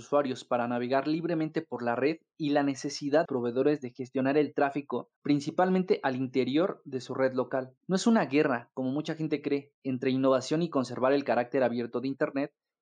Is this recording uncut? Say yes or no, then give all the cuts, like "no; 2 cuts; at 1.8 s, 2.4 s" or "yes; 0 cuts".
no; 3 cuts; at 3.2 s, 5.2 s, 7.8 s